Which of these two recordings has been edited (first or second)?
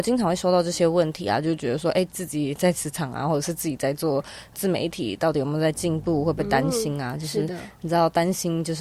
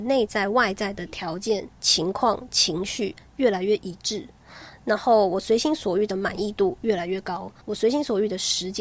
second